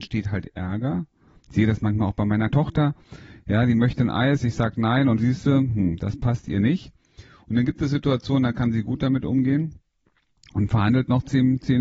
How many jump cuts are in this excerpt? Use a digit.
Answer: 2